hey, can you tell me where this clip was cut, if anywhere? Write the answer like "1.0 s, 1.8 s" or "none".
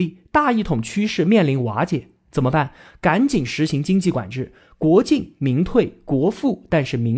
none